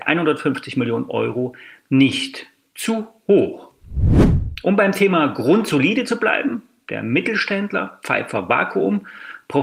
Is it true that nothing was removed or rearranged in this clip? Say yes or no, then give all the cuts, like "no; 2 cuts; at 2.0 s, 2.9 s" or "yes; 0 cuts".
yes; 0 cuts